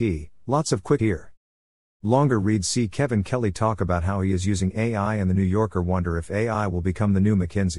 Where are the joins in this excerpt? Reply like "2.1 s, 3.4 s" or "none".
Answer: 1.0 s